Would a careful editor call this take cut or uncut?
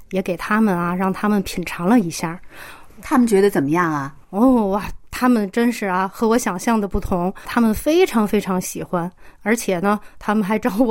uncut